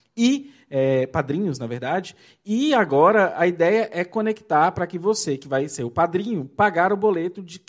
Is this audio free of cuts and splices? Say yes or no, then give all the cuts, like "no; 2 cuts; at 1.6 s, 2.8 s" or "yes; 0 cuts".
yes; 0 cuts